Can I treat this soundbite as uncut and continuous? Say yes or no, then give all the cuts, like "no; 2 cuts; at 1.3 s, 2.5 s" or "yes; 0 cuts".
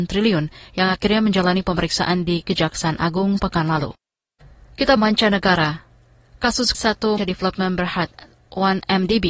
no; 4 cuts; at 3.4 s, 5.0 s, 6.7 s, 7.2 s